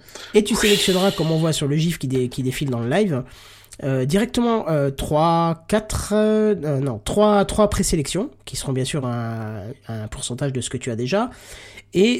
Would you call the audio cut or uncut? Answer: uncut